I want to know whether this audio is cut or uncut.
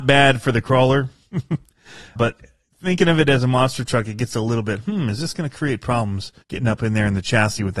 cut